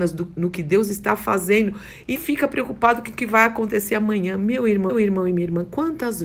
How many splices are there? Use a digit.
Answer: 2